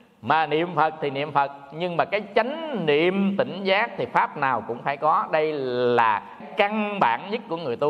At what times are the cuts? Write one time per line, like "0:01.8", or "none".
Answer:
0:06.4